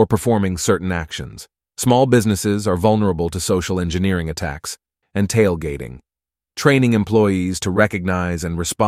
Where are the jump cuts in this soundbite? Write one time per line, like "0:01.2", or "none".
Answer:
0:01.6
0:05.0